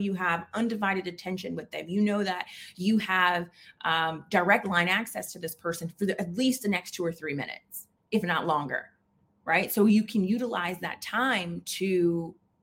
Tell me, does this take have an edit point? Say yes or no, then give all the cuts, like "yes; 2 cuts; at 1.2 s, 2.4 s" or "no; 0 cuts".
no; 0 cuts